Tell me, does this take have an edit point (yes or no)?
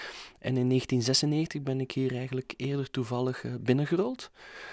no